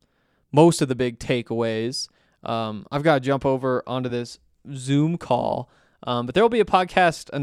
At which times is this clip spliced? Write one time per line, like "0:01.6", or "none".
none